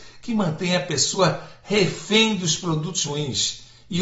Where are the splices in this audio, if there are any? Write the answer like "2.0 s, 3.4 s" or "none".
3.0 s